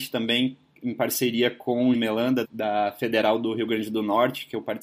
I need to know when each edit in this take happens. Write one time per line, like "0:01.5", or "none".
0:01.9
0:02.4